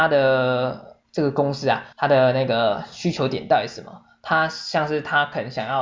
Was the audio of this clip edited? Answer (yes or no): yes